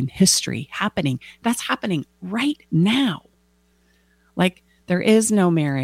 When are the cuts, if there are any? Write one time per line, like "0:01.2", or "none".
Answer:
0:02.6